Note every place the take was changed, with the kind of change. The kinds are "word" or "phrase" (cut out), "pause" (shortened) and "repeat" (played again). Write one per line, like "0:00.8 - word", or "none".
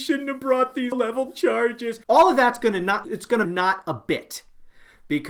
0:00.9 - word
0:02.0 - pause
0:03.0 - word
0:03.4 - word